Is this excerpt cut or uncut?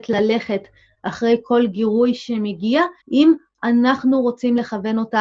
cut